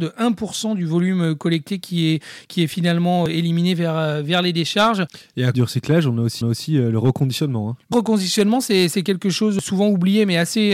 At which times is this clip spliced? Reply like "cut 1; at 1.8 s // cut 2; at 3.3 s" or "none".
cut 1; at 5.5 s // cut 2; at 6.4 s // cut 3; at 7.9 s